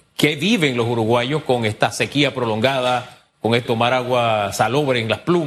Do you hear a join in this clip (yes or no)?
yes